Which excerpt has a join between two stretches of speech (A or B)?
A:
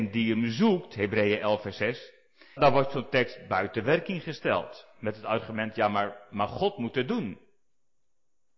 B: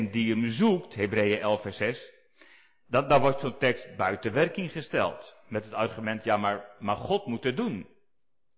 A